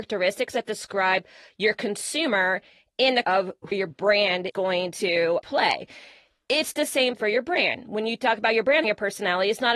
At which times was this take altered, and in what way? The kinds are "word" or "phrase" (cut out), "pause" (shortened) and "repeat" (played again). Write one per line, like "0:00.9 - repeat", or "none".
0:03.2 - word
0:03.7 - word
0:04.5 - word
0:05.4 - word
0:07.2 - word
0:08.8 - word